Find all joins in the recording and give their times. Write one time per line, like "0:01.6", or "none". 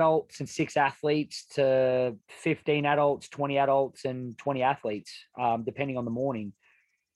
0:02.2